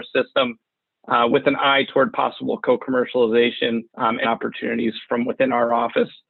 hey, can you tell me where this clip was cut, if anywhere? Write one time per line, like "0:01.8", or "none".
0:03.9
0:04.2
0:05.0